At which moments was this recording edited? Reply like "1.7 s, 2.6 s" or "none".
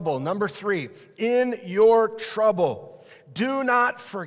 none